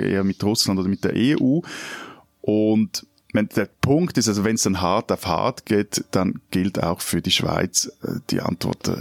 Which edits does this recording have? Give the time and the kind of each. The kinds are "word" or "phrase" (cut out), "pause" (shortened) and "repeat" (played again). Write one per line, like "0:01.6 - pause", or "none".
none